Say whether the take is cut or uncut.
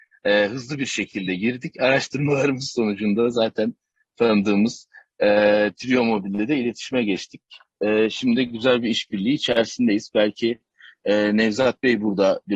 uncut